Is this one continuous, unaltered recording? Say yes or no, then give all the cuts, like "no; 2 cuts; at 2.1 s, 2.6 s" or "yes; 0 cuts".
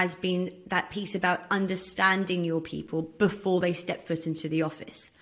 yes; 0 cuts